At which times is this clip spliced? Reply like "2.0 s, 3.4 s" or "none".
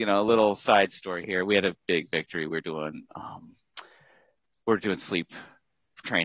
none